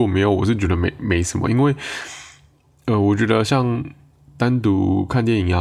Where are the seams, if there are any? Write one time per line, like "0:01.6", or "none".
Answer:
none